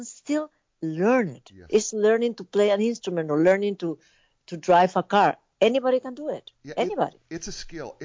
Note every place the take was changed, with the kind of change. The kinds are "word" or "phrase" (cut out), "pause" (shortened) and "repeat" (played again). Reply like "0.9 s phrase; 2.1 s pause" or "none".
1.9 s word; 6.5 s pause